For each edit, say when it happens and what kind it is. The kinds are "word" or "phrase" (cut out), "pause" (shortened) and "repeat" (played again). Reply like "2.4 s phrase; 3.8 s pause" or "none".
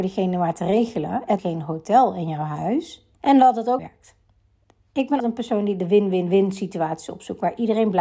1.4 s word; 3.1 s pause; 3.8 s phrase; 5.2 s word